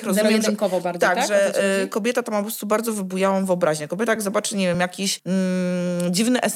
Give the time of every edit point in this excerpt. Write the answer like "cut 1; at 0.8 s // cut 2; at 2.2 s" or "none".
none